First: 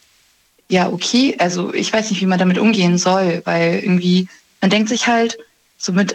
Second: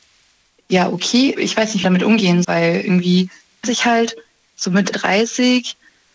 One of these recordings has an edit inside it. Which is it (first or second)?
second